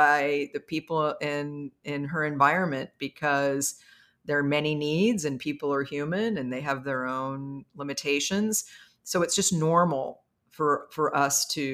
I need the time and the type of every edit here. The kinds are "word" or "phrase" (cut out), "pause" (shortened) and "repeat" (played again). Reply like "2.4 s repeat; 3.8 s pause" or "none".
none